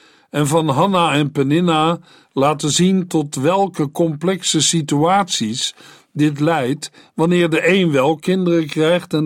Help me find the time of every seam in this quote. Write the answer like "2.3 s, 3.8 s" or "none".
none